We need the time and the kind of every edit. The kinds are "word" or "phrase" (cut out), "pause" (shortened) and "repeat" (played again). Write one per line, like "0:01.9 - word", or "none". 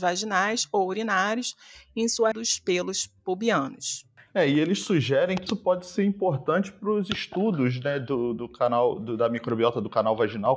0:02.3 - phrase
0:05.5 - word

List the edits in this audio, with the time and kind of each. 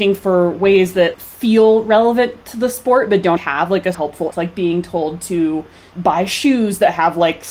0:03.4 - word
0:03.9 - word
0:04.3 - word

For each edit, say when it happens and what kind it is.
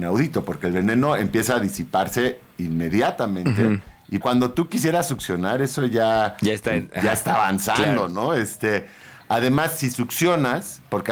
0:04.2 - word

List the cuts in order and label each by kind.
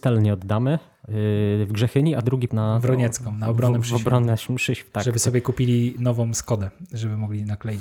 0:02.5 - word

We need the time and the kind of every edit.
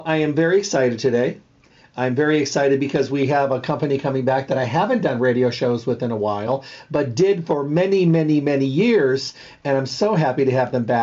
none

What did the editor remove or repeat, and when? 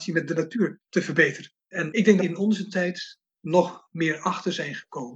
0:01.6 - pause
0:02.2 - phrase

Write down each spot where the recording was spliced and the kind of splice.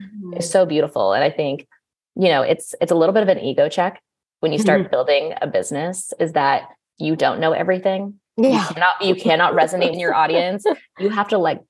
0:09.9 - phrase

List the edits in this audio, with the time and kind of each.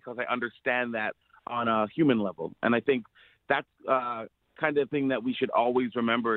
0:03.8 - pause

